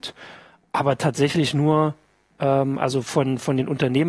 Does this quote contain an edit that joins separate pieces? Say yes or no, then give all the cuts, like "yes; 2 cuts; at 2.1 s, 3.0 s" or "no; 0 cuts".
no; 0 cuts